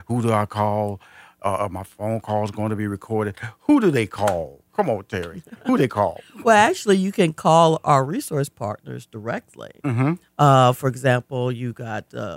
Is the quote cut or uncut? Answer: cut